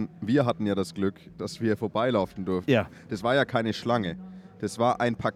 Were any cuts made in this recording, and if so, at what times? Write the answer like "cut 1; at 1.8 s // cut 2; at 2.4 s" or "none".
none